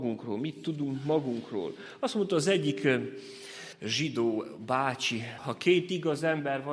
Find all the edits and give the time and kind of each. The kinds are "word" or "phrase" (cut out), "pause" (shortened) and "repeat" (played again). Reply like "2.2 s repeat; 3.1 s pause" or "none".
3.7 s pause; 5.4 s word